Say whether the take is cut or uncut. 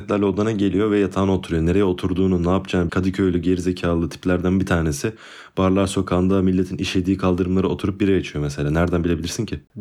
cut